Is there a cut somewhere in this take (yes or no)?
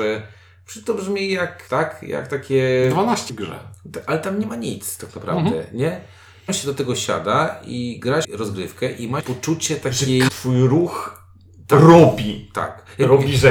yes